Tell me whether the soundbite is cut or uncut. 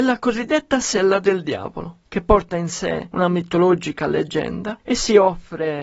uncut